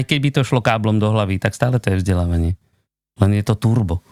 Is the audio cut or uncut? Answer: uncut